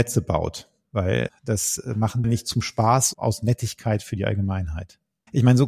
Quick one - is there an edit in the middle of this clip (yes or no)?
yes